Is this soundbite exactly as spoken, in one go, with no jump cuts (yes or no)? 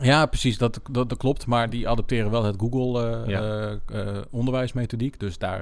yes